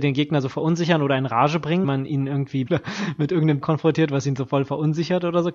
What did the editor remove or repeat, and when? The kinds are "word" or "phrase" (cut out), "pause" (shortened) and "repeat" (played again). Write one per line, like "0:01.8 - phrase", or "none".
0:01.8 - word
0:02.7 - word
0:03.6 - word